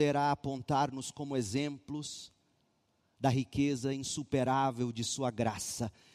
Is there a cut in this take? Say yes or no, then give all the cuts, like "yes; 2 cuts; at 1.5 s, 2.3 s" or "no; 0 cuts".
no; 0 cuts